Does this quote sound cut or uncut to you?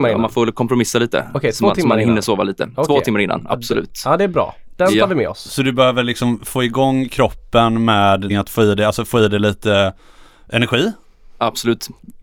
cut